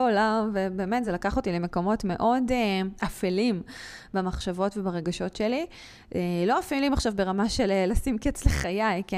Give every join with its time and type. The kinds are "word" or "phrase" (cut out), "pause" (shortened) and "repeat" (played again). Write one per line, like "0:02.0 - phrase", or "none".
none

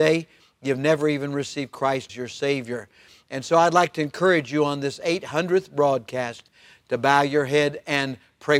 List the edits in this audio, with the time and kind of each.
0:02.1 - word

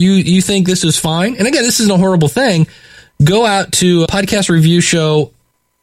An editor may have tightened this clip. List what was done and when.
0:04.1 - word

